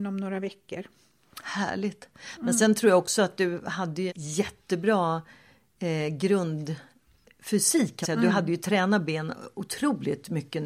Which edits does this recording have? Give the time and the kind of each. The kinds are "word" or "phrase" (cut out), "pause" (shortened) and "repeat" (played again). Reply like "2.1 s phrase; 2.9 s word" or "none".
4.1 s word; 8.0 s word